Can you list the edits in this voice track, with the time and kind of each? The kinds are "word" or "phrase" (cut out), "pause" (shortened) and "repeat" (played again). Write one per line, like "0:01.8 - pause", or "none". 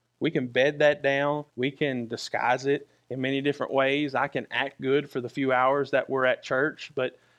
0:01.5 - pause